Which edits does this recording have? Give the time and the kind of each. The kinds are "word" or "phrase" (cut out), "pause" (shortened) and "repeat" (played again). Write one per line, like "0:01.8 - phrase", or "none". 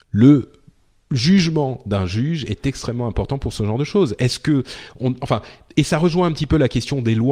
none